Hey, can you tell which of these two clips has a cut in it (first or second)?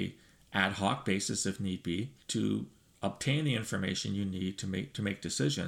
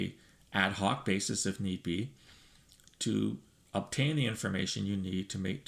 first